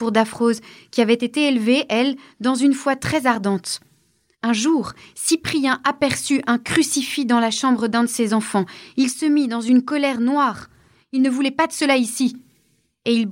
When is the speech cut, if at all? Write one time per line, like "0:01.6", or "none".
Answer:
none